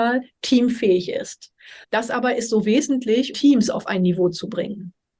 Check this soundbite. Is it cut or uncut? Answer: cut